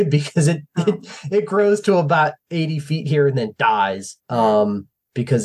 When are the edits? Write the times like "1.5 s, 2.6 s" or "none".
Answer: 2.4 s, 4.2 s